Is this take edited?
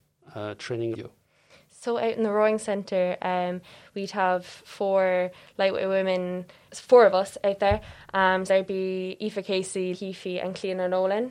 yes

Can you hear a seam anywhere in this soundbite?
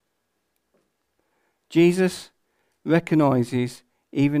no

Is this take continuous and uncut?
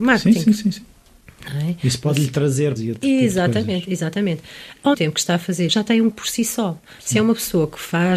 no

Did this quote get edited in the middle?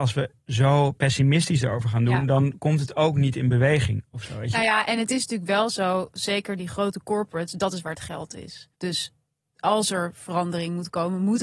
yes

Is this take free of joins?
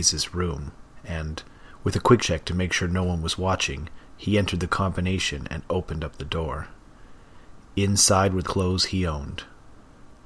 no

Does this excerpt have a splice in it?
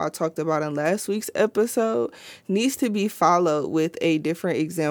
no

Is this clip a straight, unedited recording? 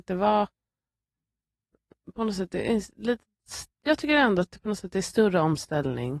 no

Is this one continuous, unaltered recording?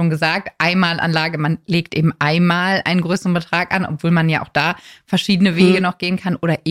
yes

